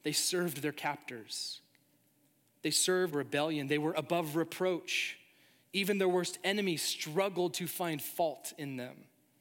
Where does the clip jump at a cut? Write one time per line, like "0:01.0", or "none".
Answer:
0:03.1